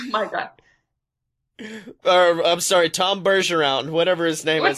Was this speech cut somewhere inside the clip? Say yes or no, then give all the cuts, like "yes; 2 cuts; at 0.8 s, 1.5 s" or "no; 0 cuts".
no; 0 cuts